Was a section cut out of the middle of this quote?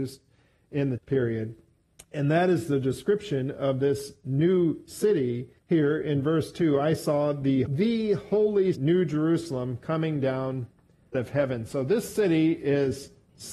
yes; 6 cuts; at 1.0 s, 1.8 s, 5.6 s, 7.7 s, 8.7 s, 11.1 s

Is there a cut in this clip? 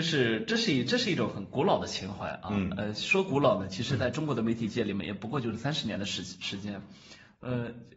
no; 0 cuts

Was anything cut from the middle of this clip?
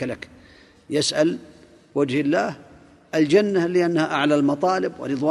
no; 0 cuts

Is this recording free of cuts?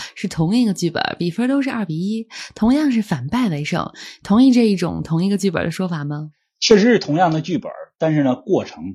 yes; 0 cuts

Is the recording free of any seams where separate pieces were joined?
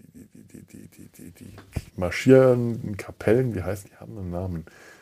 no; 2 cuts; at 1.9 s, 3.8 s

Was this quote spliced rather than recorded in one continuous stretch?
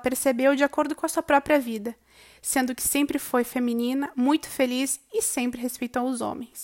no; 0 cuts

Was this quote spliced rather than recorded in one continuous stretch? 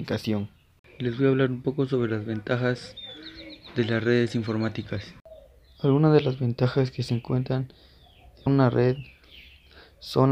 yes; 1 cut; at 8.5 s

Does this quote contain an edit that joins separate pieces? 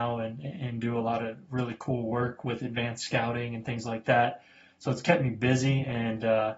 no; 0 cuts

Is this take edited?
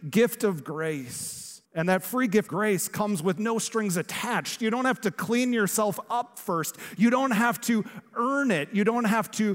yes; 2 cuts; at 1.6 s, 2.5 s

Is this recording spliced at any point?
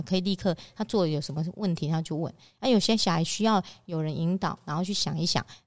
no; 0 cuts

